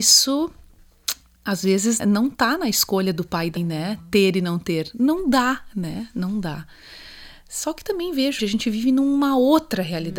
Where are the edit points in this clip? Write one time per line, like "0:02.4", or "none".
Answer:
0:02.0
0:03.6
0:08.4